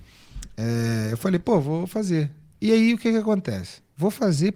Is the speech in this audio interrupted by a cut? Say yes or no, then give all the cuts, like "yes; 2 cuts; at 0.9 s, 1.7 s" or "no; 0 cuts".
no; 0 cuts